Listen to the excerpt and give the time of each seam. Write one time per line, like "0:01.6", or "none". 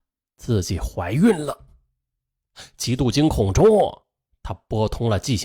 none

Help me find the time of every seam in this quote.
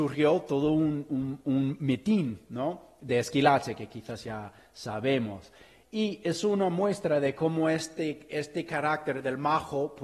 none

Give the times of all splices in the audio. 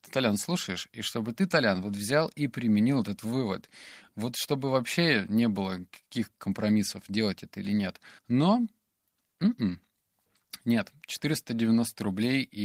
0:08.2

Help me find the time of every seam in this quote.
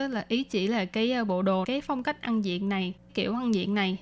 0:01.6
0:03.1

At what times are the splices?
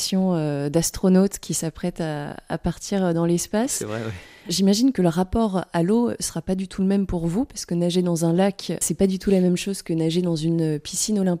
none

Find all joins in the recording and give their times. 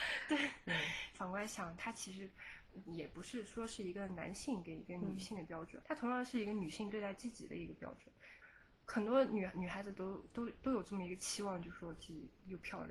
0:05.8

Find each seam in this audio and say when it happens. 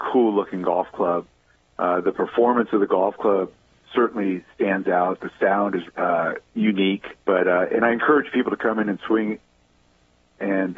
0:05.9
0:07.2

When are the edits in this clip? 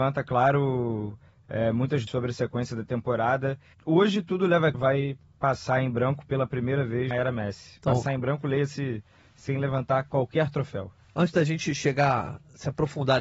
0:02.1
0:03.7
0:04.7
0:07.1

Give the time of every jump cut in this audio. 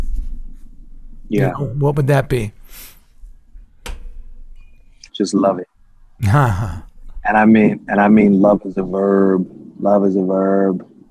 0:05.1
0:05.7

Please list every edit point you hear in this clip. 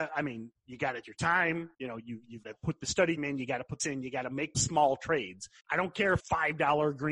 0:01.0
0:01.7
0:02.4
0:03.2
0:03.8
0:04.5
0:05.6
0:06.2

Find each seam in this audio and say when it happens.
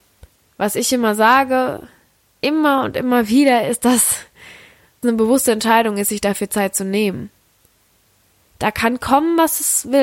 0:05.0

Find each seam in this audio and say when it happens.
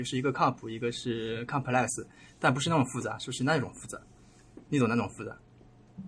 none

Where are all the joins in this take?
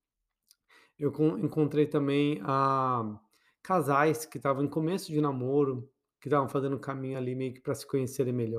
none

